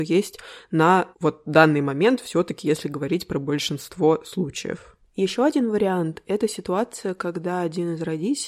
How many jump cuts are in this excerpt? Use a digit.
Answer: 1